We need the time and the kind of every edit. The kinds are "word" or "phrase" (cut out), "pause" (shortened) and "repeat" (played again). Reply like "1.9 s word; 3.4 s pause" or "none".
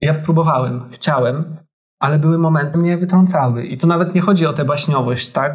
1.8 s pause; 2.7 s word